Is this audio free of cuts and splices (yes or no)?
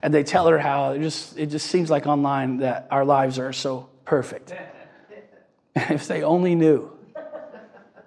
yes